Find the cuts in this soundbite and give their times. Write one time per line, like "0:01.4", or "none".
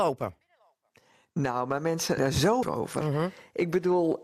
0:02.2
0:02.6